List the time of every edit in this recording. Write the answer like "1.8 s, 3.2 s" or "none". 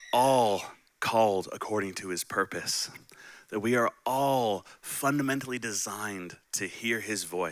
none